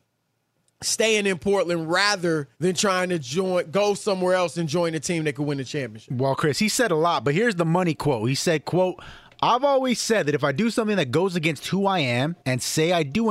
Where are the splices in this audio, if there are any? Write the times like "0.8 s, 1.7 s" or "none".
2.5 s, 12.4 s